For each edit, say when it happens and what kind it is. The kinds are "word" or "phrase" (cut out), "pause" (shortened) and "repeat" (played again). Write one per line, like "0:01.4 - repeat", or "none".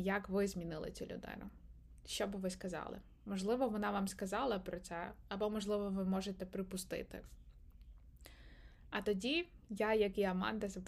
none

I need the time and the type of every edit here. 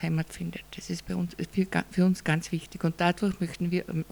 none

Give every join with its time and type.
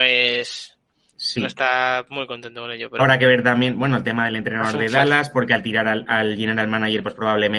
0:03.0 - phrase

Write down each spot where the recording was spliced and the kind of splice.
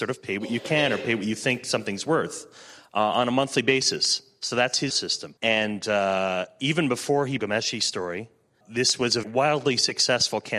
0:04.9 - word
0:05.4 - pause
0:07.4 - phrase
0:08.6 - word
0:09.2 - word

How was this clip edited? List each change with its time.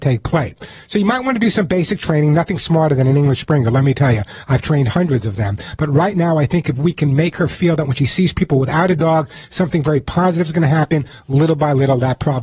none

